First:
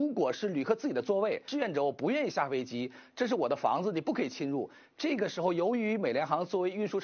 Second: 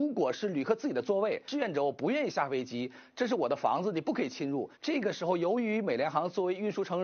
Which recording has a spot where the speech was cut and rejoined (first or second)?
second